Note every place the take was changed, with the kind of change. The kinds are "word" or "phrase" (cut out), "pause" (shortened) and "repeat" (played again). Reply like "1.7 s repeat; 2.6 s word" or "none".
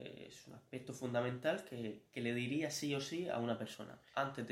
none